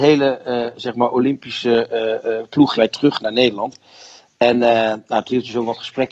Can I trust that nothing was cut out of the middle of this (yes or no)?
no